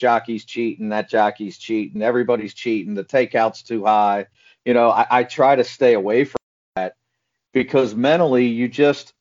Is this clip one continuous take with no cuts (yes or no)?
yes